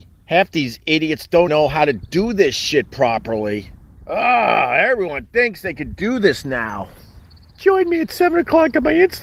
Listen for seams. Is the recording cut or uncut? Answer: cut